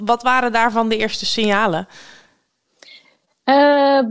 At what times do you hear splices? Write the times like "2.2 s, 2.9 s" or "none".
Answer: none